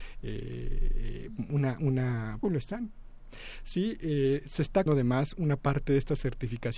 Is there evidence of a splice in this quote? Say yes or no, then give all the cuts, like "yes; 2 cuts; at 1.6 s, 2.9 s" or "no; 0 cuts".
yes; 2 cuts; at 2.4 s, 4.9 s